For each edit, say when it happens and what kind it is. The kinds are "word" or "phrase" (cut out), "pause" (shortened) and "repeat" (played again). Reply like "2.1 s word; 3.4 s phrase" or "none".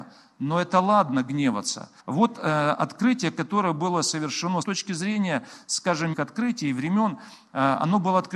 2.0 s pause; 4.6 s phrase; 6.1 s phrase